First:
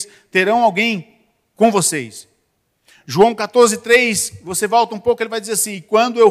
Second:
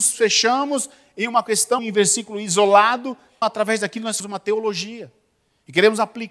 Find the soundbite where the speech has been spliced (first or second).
second